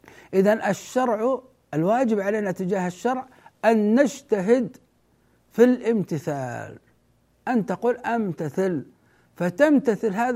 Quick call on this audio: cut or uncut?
uncut